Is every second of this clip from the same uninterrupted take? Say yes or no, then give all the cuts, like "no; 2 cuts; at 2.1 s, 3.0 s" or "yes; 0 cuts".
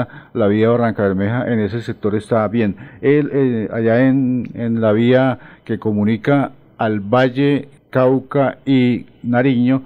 yes; 0 cuts